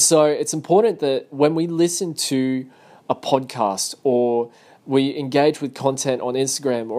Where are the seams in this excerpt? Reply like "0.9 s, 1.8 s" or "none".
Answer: none